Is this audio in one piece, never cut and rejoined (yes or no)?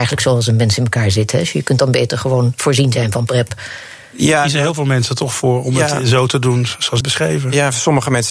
no